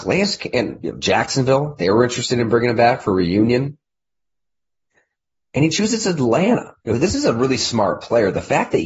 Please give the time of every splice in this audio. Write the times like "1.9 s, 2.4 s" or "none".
6.8 s

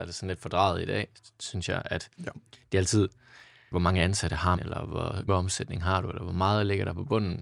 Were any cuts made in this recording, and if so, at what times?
3.7 s, 4.6 s, 5.3 s

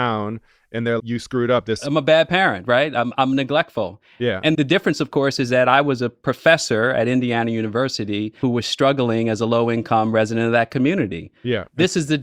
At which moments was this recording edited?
1.0 s, 4.5 s, 8.4 s

